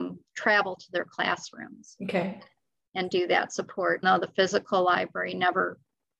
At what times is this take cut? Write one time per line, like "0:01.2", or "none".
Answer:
0:04.0

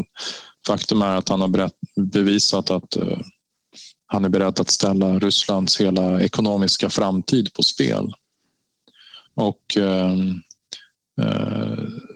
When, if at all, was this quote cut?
0:09.3

